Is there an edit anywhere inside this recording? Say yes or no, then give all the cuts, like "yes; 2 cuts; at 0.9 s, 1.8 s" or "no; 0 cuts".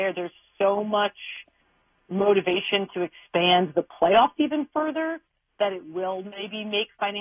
no; 0 cuts